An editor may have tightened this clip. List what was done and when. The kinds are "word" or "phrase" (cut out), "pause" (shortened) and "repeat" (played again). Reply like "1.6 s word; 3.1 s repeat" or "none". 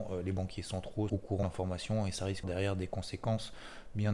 1.1 s word; 1.4 s word; 2.4 s word